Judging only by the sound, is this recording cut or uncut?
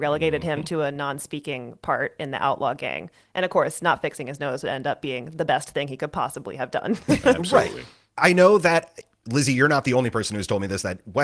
uncut